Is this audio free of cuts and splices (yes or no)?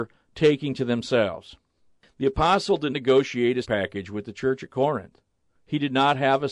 no